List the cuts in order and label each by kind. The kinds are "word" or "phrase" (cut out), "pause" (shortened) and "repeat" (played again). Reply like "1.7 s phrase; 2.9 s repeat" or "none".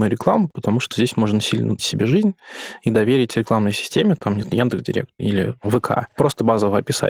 1.8 s word; 4.4 s word